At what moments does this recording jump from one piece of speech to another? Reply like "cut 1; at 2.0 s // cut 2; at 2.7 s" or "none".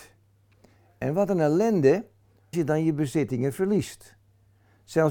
cut 1; at 2.5 s